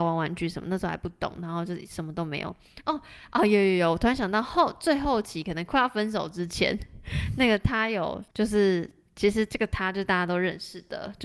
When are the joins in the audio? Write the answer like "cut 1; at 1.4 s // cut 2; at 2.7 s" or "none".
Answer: cut 1; at 8.3 s